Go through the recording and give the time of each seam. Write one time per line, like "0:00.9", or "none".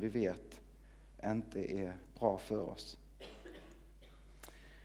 none